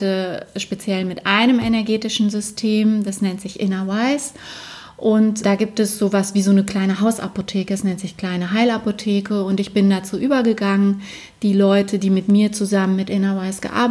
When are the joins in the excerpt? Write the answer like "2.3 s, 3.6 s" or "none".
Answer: 5.4 s

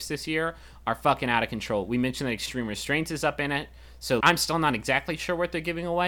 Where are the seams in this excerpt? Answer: 4.2 s

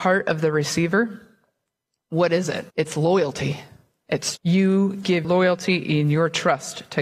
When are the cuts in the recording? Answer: 2.7 s, 4.4 s, 5.2 s

